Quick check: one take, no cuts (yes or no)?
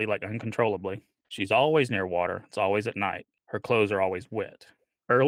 yes